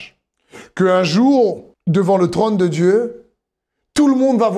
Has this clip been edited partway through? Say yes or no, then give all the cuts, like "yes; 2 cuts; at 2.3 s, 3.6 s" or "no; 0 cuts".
yes; 1 cut; at 1.7 s